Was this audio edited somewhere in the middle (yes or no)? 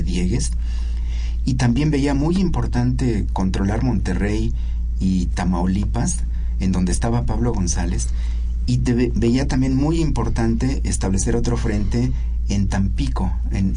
no